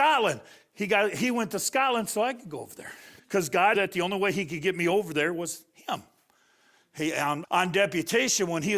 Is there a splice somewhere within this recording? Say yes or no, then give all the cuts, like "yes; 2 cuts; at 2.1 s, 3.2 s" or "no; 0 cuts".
yes; 3 cuts; at 3.2 s, 3.7 s, 7.4 s